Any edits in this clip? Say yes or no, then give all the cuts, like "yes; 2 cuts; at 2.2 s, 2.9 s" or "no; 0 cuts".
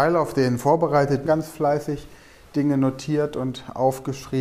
yes; 1 cut; at 1.3 s